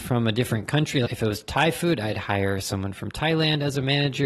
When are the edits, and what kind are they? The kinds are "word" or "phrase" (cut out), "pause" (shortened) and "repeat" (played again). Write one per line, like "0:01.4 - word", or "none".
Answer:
0:01.1 - word